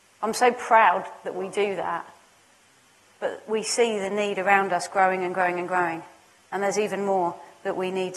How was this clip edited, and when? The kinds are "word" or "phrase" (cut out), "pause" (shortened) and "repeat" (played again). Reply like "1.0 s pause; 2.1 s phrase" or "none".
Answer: none